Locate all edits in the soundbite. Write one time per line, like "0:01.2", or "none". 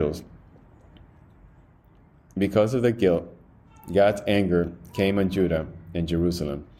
none